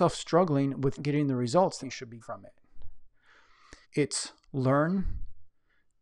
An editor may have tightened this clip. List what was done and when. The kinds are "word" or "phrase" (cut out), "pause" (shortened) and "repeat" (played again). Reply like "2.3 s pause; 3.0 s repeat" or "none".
1.0 s word; 1.8 s phrase; 2.2 s word; 3.8 s pause